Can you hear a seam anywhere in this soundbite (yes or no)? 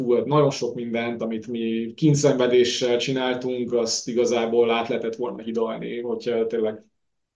no